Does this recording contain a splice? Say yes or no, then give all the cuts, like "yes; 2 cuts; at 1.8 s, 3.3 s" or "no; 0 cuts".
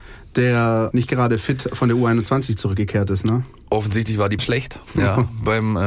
yes; 3 cuts; at 0.9 s, 4.4 s, 4.8 s